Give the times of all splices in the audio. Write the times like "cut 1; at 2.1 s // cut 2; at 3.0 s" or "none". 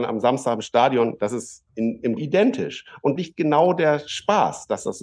cut 1; at 1.7 s // cut 2; at 2.2 s // cut 3; at 3.2 s